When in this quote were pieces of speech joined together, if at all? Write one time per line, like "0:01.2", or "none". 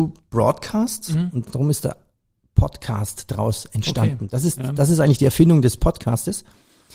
none